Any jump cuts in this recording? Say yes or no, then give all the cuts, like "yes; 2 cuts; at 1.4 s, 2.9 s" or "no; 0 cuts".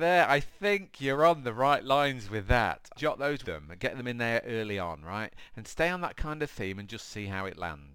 yes; 2 cuts; at 3.0 s, 3.4 s